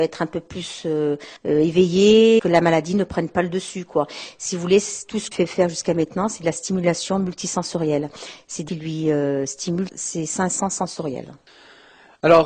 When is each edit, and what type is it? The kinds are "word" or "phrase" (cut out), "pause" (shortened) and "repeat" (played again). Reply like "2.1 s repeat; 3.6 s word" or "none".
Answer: 1.4 s pause; 2.4 s phrase; 5.3 s phrase; 8.7 s phrase; 9.9 s word